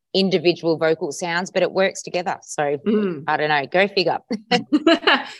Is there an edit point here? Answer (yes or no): no